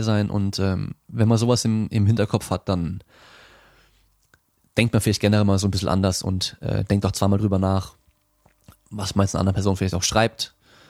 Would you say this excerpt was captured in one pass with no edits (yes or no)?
yes